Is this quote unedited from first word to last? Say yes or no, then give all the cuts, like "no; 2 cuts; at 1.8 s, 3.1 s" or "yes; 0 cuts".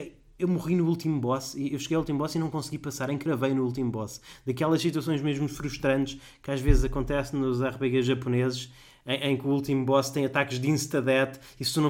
yes; 0 cuts